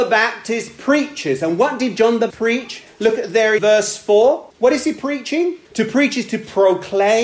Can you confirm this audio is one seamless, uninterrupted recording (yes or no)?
no